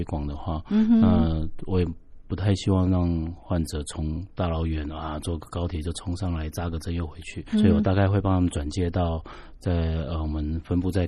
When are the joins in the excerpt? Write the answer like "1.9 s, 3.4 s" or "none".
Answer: 7.5 s